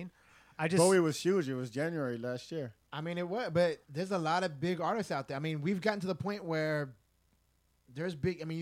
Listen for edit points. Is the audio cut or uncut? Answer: cut